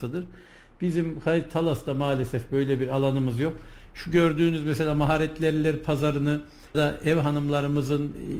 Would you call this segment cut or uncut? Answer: cut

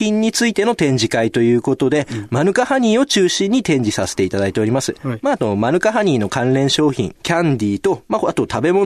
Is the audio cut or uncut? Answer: cut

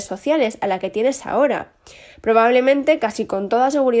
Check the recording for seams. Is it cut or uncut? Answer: uncut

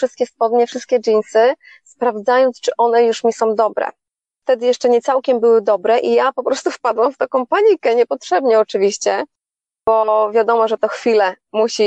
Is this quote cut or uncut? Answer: uncut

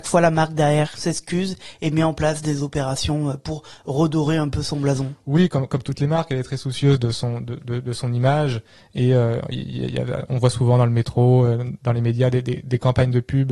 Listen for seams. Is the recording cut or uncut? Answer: uncut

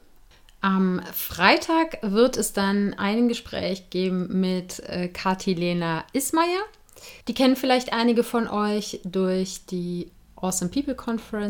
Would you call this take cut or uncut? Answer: cut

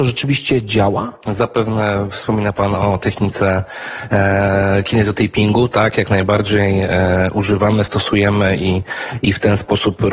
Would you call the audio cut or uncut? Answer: uncut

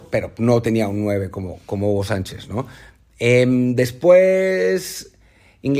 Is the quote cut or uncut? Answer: uncut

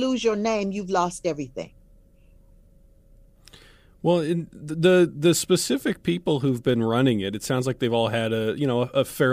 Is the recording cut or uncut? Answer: uncut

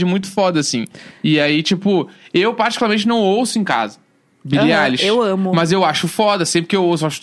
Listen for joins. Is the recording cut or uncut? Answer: uncut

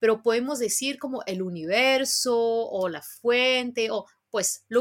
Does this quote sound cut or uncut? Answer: uncut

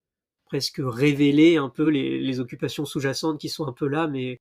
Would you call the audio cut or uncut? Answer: uncut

